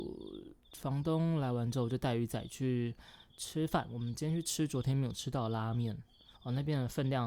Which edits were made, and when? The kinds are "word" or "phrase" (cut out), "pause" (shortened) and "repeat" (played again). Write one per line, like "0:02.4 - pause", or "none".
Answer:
0:03.3 - pause
0:06.3 - pause